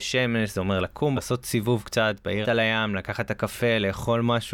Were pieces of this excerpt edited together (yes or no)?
yes